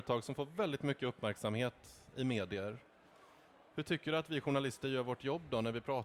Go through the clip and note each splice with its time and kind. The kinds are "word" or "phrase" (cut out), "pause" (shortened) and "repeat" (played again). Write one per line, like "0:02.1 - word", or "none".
none

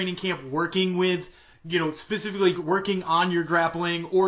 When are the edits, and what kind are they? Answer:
0:02.5 - word

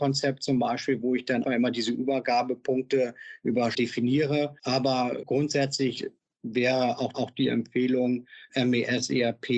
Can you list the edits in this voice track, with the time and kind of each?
0:01.4 - word
0:03.7 - word
0:05.2 - word
0:07.1 - repeat

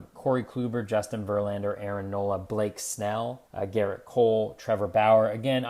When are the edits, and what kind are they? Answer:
0:03.5 - pause

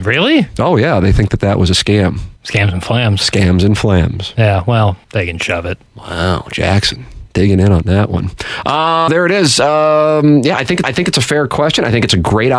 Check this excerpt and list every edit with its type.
0:02.4 - pause
0:05.0 - pause
0:05.9 - pause
0:09.1 - word
0:10.8 - repeat

